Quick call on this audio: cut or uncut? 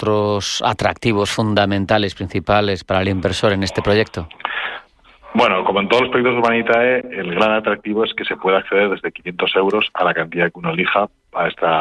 uncut